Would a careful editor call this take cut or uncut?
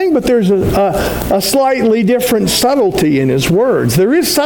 uncut